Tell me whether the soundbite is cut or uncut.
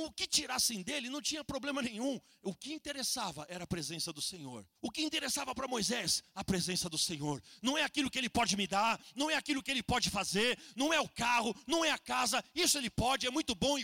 cut